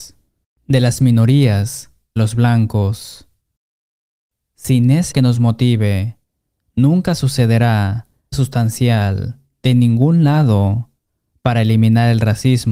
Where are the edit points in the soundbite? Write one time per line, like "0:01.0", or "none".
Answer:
0:02.2
0:05.1
0:08.3